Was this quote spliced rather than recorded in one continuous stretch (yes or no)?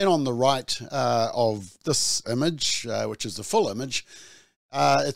no